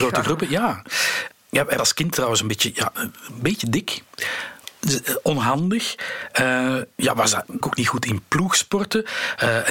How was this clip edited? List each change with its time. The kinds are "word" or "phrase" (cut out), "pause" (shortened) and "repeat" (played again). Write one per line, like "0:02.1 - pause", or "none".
0:01.8 - word
0:07.6 - word